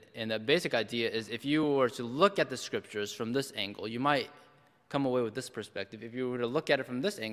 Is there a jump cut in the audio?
no; 0 cuts

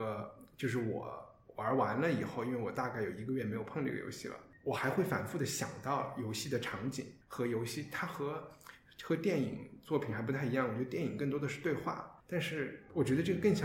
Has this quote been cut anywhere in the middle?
yes; 2 cuts; at 7.2 s, 12.2 s

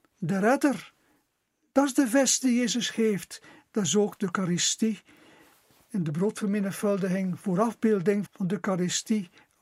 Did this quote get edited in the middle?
yes; 1 cut; at 8.3 s

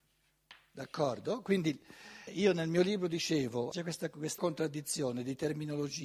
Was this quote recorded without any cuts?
no; 3 cuts; at 2.3 s, 3.7 s, 4.4 s

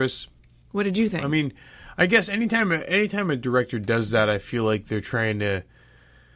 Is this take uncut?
yes; 0 cuts

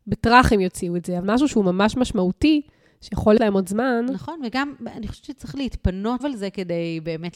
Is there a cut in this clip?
yes; 3 cuts; at 1.2 s, 3.4 s, 6.2 s

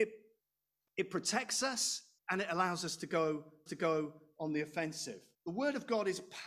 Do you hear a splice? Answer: yes; 3 cuts; at 2.2 s, 3.7 s, 5.3 s

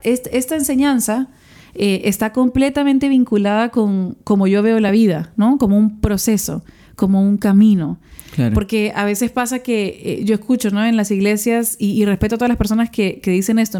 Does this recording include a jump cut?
no; 0 cuts

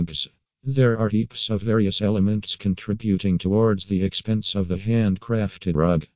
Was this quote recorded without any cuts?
yes; 0 cuts

